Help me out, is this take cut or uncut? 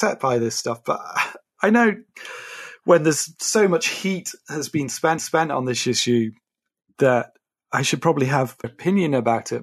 cut